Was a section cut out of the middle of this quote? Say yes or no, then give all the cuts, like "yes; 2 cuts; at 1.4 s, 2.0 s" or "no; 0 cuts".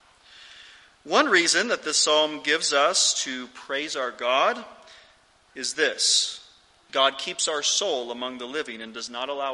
no; 0 cuts